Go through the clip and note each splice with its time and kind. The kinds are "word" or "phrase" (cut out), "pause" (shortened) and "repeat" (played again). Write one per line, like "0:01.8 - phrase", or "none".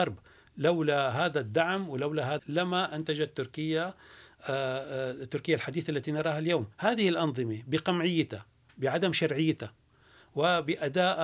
0:02.4 - word
0:06.7 - pause